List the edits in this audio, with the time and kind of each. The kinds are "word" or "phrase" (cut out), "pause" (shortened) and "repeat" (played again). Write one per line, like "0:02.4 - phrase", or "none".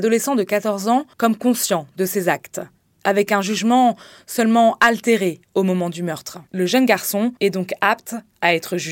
0:01.1 - pause
0:02.8 - pause
0:06.5 - pause
0:07.4 - pause